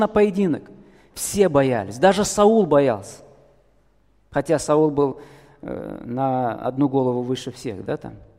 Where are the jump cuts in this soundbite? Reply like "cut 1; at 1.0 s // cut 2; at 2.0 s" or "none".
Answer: none